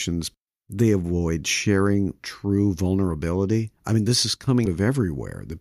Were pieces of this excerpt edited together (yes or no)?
yes